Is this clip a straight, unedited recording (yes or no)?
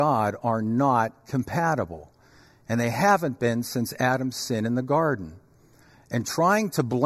yes